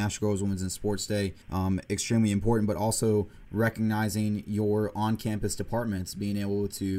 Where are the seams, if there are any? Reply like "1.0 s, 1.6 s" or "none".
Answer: 1.4 s